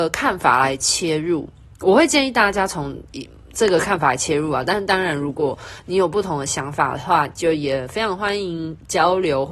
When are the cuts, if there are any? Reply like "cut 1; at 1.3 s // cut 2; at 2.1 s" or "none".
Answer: cut 1; at 1.7 s